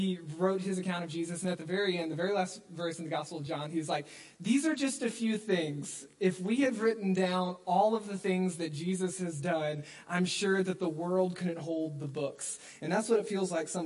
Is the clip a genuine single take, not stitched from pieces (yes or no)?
yes